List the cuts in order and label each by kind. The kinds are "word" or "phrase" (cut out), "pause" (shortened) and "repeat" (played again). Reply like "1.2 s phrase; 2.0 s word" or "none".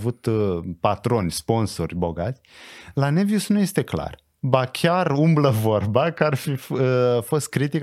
none